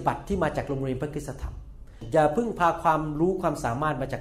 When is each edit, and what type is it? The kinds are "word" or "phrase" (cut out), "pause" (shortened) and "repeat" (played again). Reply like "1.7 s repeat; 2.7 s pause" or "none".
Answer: none

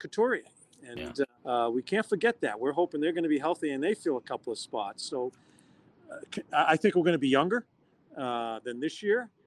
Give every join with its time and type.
1.4 s pause

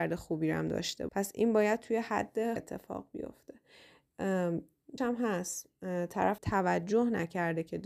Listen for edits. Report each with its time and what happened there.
1.1 s word; 2.6 s word; 5.0 s word; 6.4 s word

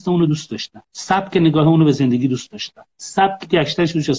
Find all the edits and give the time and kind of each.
2.9 s pause

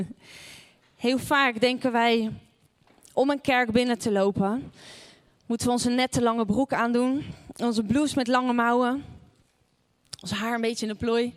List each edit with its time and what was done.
none

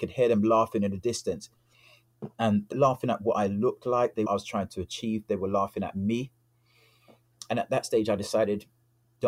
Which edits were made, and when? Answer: 2.3 s pause; 2.7 s word; 4.3 s phrase

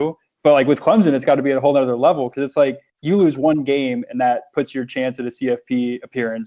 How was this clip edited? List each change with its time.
2.9 s pause

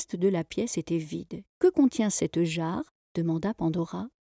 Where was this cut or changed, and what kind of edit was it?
1.5 s pause; 3.0 s pause

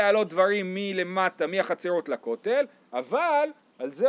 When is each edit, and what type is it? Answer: none

